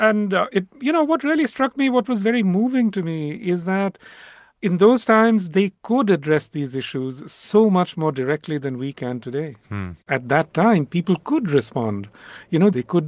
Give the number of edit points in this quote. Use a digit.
0